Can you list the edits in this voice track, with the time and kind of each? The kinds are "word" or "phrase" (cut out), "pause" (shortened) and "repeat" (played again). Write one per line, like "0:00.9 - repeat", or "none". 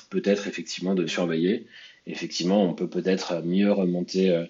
0:01.1 - word